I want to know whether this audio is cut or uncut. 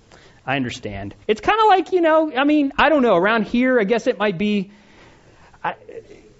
cut